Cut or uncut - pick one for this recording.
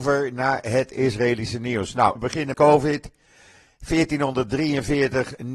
cut